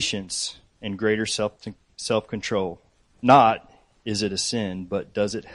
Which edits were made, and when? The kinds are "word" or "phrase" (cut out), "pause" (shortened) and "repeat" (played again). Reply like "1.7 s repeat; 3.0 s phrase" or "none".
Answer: 2.9 s pause